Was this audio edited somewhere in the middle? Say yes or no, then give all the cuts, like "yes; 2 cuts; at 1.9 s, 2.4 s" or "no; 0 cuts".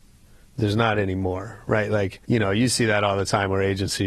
yes; 1 cut; at 2.2 s